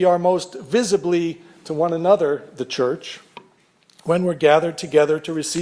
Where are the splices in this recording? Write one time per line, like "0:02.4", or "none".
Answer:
none